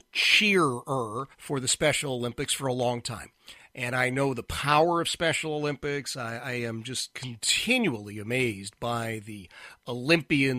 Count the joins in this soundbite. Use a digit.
1